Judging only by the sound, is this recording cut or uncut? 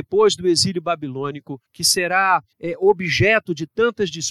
cut